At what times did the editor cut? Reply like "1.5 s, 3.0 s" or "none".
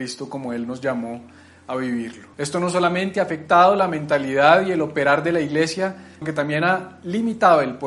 2.3 s, 6.2 s